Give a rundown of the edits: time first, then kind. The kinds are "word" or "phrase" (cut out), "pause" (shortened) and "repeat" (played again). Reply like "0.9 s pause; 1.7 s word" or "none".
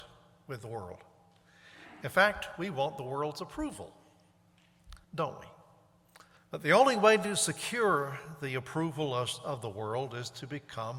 5.0 s pause; 6.4 s pause